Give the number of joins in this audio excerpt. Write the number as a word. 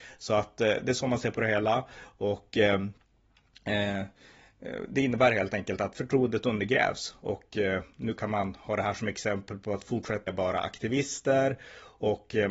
one